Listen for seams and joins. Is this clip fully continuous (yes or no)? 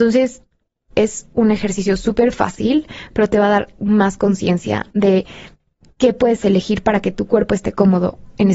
yes